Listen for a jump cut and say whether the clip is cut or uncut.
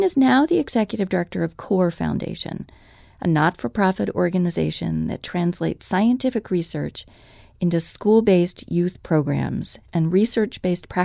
uncut